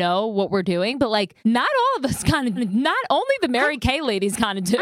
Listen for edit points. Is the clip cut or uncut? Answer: cut